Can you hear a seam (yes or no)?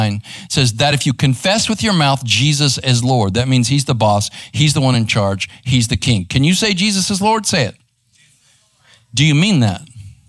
no